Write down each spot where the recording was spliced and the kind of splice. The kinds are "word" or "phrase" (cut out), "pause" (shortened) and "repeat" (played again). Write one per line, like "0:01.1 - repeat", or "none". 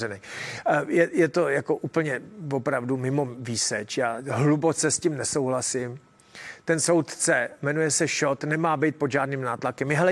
none